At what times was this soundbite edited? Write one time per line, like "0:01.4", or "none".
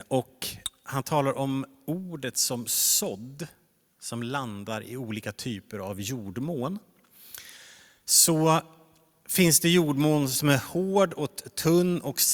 none